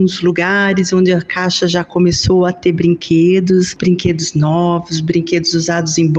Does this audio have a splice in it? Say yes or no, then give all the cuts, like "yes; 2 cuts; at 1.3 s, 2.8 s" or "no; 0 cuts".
no; 0 cuts